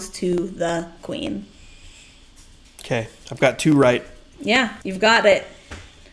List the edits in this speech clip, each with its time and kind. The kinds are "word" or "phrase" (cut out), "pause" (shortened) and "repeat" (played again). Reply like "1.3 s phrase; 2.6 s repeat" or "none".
4.8 s pause